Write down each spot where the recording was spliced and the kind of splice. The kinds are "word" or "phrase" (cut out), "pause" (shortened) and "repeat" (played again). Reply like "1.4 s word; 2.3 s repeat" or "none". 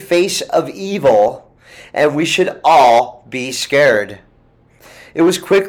none

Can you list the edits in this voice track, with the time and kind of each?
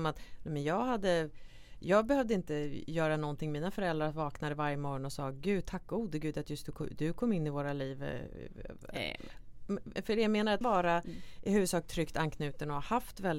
10.6 s phrase

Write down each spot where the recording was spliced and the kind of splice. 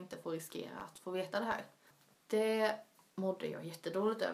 none

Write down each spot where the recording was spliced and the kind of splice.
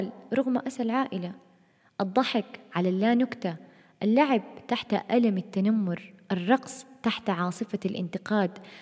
none

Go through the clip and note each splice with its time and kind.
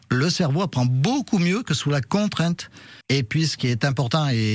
3.0 s pause

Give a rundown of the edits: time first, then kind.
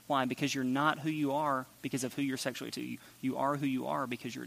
2.7 s word

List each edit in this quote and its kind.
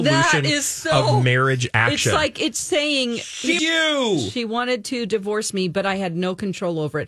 3.6 s phrase

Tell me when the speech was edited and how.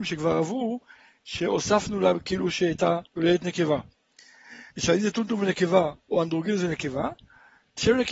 3.1 s pause; 4.7 s pause

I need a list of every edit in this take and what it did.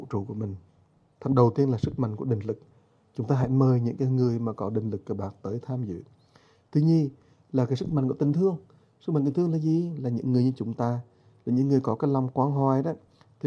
none

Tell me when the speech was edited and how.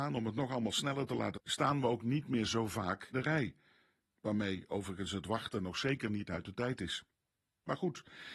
1.3 s word; 3.1 s word

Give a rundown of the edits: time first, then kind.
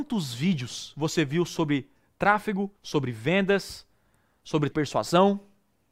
2.8 s pause; 4.7 s phrase

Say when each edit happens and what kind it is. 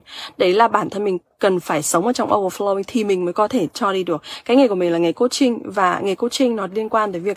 none

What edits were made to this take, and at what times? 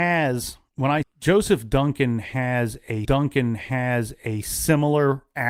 1.0 s phrase; 3.0 s repeat

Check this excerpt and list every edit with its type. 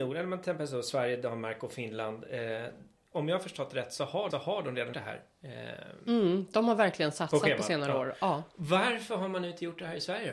4.3 s repeat; 4.9 s word

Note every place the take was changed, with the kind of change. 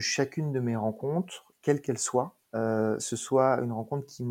2.4 s pause

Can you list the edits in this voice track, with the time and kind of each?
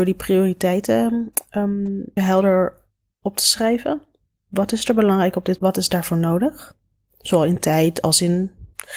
2.2 s word; 5.6 s phrase

